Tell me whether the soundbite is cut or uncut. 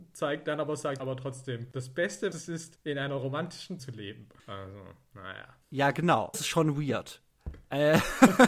cut